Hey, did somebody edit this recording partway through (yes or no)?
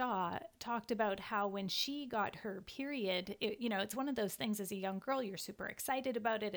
no